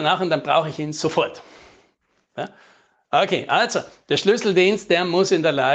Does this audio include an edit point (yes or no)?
no